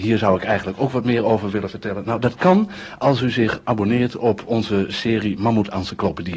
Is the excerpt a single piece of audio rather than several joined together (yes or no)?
yes